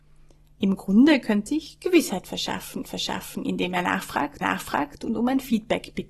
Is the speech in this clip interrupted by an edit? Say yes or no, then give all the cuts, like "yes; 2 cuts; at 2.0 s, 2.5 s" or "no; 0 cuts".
yes; 3 cuts; at 1.5 s, 2.8 s, 4.4 s